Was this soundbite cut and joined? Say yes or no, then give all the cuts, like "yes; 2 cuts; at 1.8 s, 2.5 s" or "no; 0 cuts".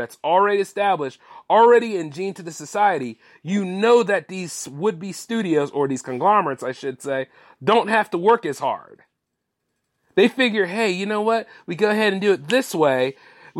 no; 0 cuts